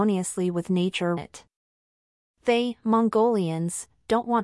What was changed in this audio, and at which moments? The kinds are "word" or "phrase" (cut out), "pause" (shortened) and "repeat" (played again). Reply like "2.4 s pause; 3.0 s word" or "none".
1.2 s phrase